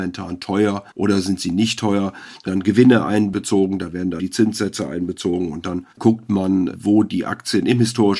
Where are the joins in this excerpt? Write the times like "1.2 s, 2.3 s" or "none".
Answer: 0.9 s, 2.5 s, 4.2 s, 5.9 s

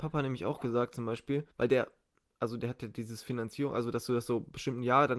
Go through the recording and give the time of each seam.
1.5 s

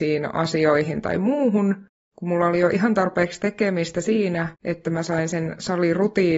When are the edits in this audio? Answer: 4.5 s

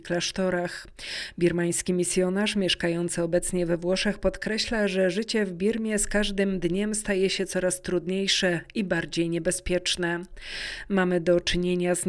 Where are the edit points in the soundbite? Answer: none

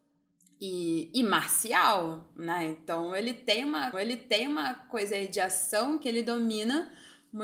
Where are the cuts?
3.9 s

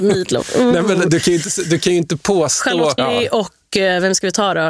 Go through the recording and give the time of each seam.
3.0 s

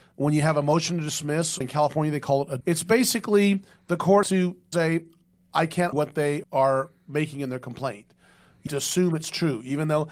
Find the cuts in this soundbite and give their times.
1.6 s, 2.6 s, 4.2 s, 4.7 s, 5.9 s, 6.4 s, 8.7 s

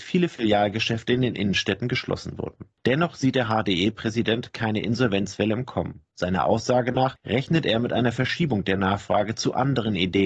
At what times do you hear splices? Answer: none

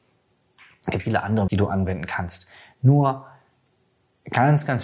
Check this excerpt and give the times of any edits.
1.0 s, 1.5 s

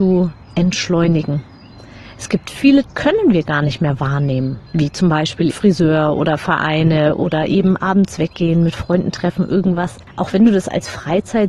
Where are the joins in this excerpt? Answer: 2.8 s, 4.7 s, 5.5 s

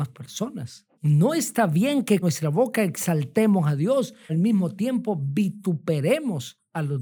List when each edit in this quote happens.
0.9 s, 2.2 s, 4.3 s

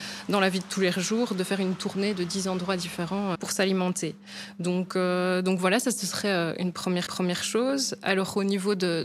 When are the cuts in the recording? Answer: 3.3 s, 7.1 s

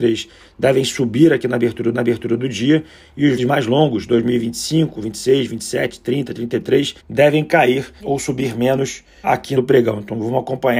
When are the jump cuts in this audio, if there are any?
1.9 s, 3.4 s, 7.0 s, 8.0 s, 9.2 s, 9.6 s

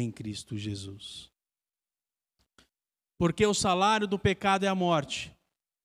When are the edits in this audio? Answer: none

